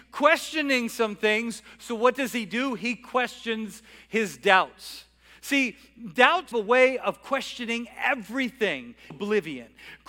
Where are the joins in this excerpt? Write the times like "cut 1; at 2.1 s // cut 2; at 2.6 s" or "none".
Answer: cut 1; at 6.5 s // cut 2; at 9.1 s